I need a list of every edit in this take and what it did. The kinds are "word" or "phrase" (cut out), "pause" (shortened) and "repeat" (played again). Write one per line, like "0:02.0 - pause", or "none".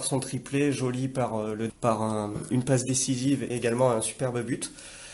0:01.7 - word
0:03.5 - word